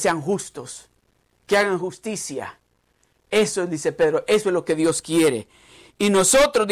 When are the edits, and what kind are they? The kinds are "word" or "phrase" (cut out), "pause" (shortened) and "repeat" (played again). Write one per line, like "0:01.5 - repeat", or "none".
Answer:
none